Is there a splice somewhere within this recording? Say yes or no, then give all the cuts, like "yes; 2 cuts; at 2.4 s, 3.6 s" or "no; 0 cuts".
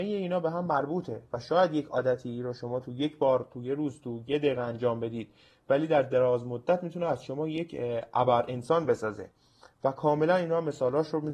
no; 0 cuts